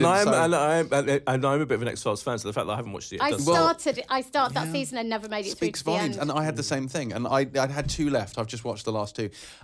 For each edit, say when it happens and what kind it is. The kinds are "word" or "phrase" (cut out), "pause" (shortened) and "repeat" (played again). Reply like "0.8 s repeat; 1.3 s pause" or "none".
8.3 s word